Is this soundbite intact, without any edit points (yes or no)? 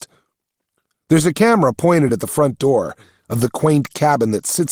yes